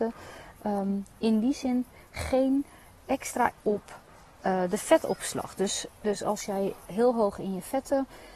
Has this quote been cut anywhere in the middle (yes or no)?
yes